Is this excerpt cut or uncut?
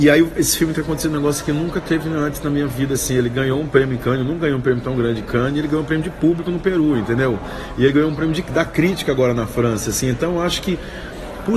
uncut